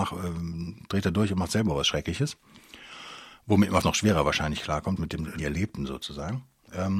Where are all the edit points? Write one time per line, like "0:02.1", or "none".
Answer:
0:03.8
0:05.0
0:05.4